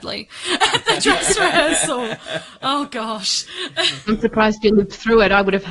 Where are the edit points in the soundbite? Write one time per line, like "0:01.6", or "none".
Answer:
none